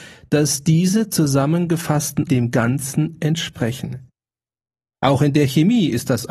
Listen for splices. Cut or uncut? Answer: cut